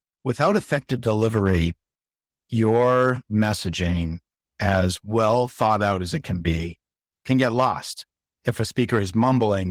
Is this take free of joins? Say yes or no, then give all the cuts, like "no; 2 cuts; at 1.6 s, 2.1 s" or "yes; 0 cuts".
yes; 0 cuts